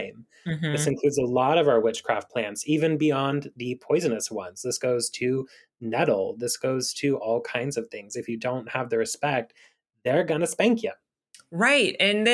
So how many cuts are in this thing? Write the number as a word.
zero